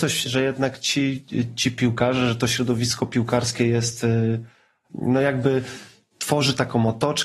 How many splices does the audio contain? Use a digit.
0